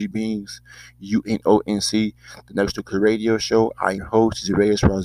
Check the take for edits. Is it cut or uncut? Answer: cut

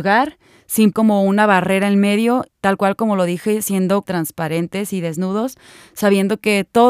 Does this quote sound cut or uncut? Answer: cut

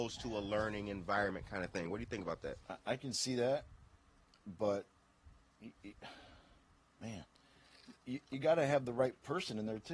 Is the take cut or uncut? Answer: uncut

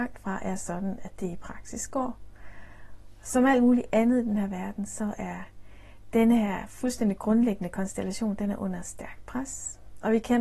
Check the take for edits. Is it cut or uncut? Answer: uncut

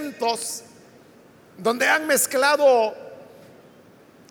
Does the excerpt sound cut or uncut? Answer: uncut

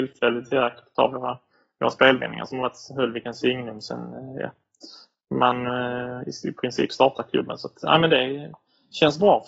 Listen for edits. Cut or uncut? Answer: uncut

